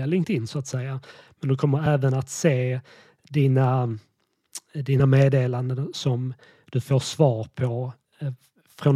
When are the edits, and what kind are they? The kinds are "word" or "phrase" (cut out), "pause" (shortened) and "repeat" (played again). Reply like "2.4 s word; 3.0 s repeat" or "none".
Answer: none